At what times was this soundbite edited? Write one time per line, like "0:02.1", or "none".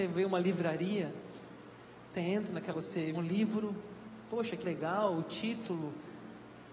0:02.1
0:02.7
0:03.1
0:04.6

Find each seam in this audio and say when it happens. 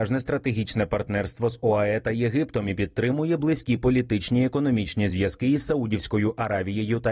none

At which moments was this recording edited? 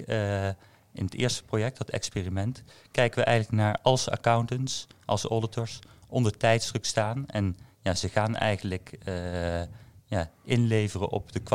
none

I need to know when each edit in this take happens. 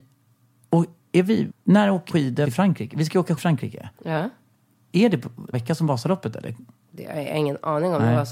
0:01.0
0:01.5
0:02.1
0:02.4
0:03.4
0:05.5

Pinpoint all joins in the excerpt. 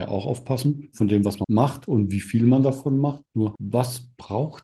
0:01.4

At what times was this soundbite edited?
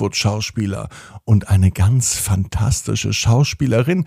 none

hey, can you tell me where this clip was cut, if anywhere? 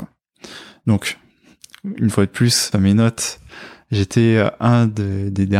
0:02.7

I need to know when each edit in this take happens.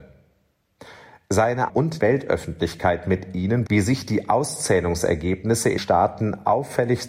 0:01.7
0:02.0
0:03.7
0:05.8

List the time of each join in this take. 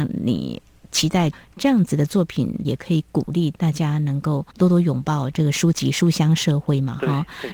0:04.5

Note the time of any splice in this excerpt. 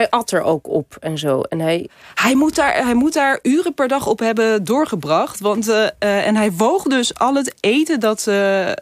none

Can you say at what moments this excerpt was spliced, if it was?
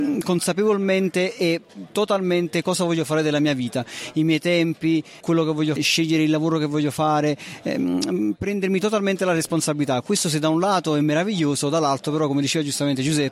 0:05.2
0:05.8

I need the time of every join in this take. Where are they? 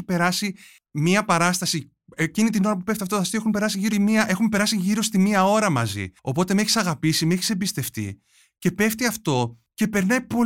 0:03.9
0:06.2

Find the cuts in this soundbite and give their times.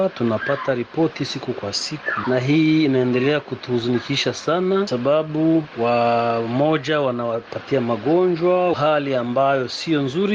0:04.9
0:08.7

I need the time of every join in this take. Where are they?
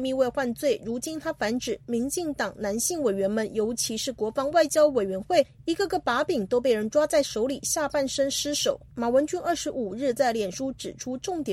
0:08.9

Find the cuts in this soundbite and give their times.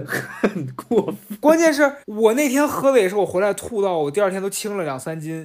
0:02.0

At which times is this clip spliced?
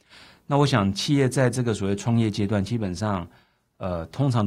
none

